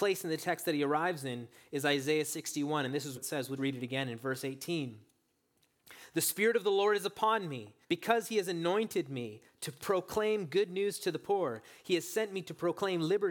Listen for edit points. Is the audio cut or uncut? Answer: cut